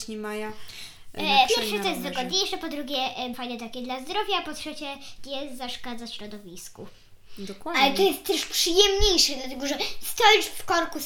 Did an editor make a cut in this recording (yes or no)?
yes